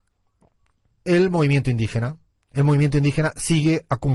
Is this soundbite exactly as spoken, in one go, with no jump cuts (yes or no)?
yes